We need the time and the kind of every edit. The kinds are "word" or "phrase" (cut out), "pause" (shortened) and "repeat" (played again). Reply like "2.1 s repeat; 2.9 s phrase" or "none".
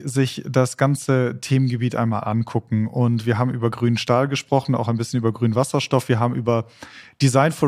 none